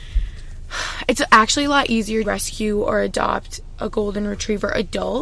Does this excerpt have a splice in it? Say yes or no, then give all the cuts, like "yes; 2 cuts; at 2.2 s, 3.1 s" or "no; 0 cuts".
yes; 1 cut; at 2.2 s